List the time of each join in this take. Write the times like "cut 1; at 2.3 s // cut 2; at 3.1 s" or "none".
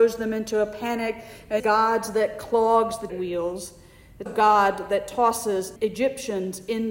cut 1; at 1.6 s // cut 2; at 3.1 s // cut 3; at 4.3 s // cut 4; at 5.8 s